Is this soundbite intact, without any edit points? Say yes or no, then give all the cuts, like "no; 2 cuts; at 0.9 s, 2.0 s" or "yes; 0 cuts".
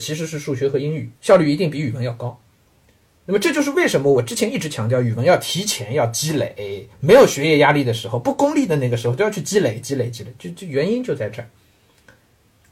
no; 2 cuts; at 1.2 s, 6.9 s